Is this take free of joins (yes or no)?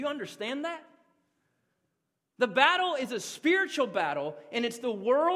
yes